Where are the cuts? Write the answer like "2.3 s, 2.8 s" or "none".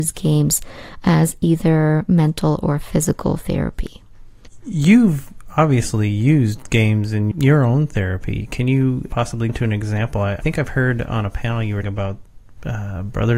7.3 s, 9.5 s, 11.8 s